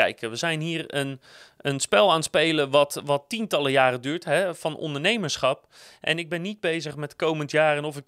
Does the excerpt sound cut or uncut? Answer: uncut